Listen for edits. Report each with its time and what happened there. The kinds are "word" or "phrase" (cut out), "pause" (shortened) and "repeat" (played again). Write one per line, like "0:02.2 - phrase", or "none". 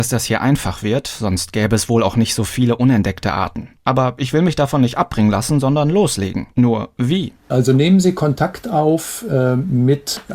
0:03.8 - pause
0:06.5 - pause